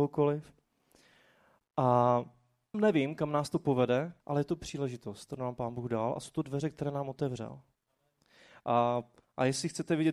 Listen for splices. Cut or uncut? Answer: cut